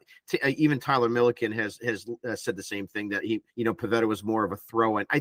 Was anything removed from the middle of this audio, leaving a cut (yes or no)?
yes